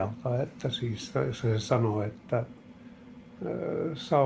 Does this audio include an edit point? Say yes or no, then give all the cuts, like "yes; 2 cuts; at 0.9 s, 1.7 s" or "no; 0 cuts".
no; 0 cuts